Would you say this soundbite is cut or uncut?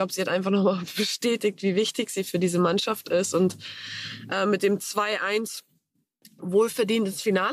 uncut